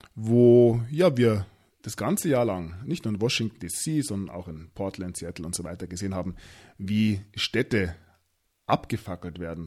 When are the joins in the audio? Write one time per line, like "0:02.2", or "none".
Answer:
none